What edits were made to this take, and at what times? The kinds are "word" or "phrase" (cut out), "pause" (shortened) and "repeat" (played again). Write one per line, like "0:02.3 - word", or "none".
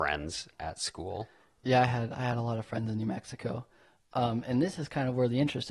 none